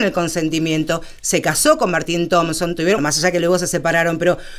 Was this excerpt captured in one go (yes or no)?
no